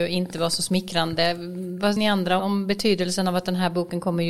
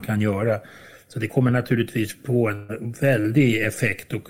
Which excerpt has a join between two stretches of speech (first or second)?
first